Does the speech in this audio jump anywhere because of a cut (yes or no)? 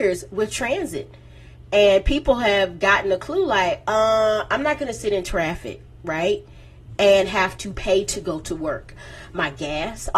no